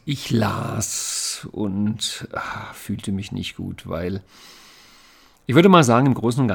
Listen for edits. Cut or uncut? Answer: uncut